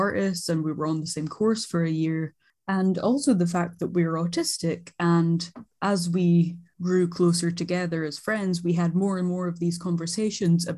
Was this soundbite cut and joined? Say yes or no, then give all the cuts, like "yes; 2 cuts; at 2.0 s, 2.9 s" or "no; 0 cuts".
no; 0 cuts